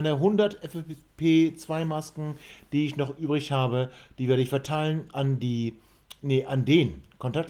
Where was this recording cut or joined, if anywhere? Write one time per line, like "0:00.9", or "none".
none